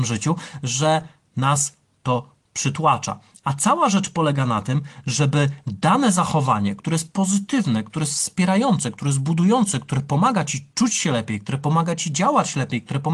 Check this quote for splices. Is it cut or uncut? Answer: uncut